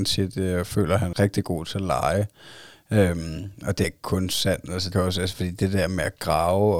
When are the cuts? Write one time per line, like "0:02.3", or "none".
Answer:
0:01.1
0:03.8
0:04.9